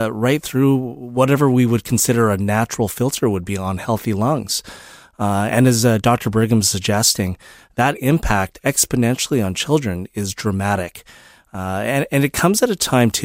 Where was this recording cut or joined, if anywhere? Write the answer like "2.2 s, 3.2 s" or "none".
none